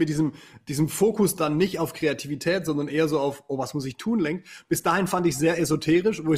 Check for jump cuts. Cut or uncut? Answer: uncut